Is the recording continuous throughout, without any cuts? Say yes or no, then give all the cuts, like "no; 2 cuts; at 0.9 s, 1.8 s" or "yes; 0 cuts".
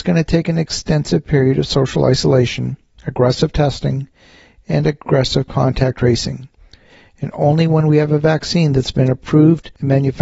yes; 0 cuts